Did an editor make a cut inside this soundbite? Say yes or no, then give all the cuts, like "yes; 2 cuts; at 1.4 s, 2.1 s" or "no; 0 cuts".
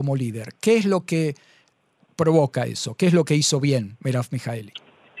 no; 0 cuts